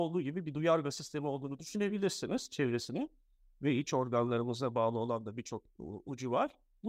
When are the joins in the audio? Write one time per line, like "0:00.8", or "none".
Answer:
none